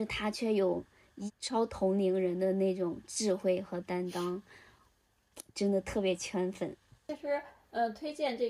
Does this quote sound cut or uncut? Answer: uncut